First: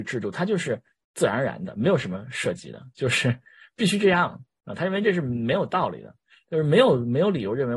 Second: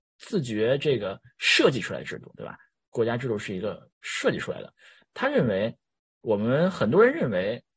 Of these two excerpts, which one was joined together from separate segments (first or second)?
second